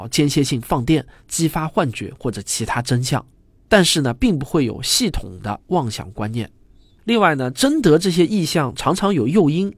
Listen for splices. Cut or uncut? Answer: uncut